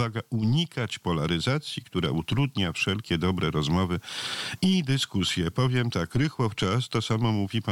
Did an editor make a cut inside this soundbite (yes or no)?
no